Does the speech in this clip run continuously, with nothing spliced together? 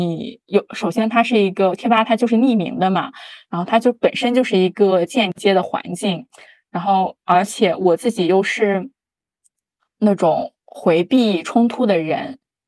yes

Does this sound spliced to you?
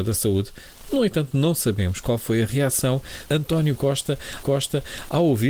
yes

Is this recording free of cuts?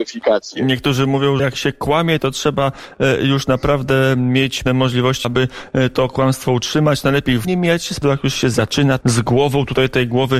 no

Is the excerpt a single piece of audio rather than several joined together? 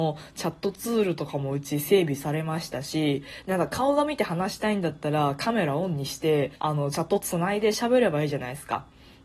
no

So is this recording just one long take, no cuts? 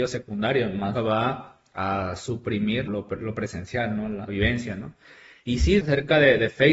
no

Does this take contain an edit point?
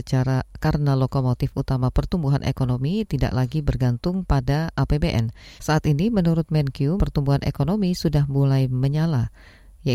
yes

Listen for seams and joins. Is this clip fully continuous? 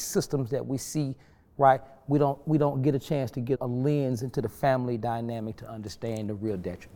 no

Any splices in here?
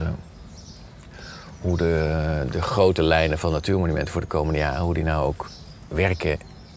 no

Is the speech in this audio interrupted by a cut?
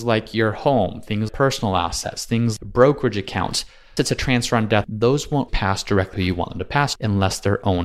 yes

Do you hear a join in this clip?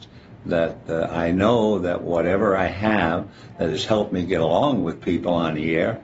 no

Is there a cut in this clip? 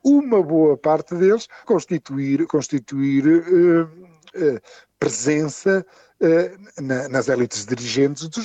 yes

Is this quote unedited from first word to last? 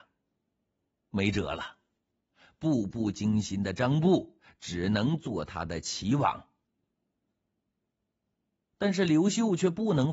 yes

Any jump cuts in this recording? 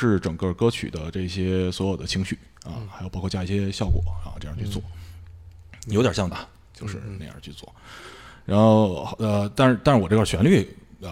yes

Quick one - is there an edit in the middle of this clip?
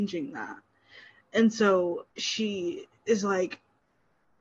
yes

